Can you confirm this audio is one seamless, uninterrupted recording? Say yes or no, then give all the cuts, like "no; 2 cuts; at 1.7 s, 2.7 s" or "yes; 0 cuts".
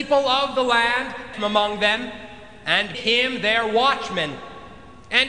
no; 2 cuts; at 1.3 s, 2.9 s